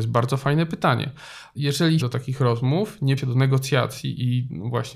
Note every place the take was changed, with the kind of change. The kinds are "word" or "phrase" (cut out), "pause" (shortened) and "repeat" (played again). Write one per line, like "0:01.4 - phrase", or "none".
0:01.5 - word
0:02.0 - phrase
0:03.2 - word